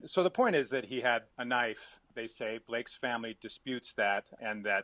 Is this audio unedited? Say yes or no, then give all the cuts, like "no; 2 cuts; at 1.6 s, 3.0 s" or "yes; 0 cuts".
no; 1 cut; at 1.3 s